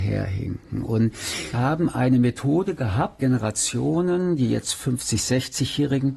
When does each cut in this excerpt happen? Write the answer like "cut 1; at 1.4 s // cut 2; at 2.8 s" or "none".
cut 1; at 1.5 s // cut 2; at 3.2 s